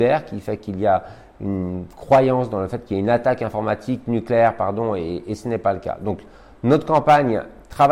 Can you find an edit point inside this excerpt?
no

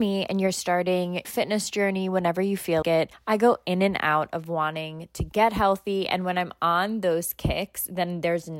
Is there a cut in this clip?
yes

